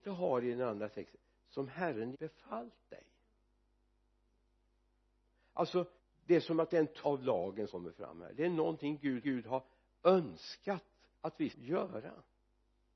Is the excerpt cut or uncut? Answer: cut